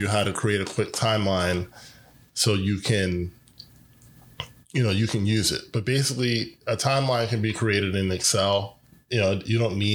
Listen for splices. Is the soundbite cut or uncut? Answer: uncut